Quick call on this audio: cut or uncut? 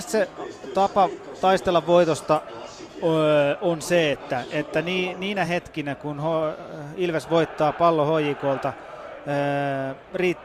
uncut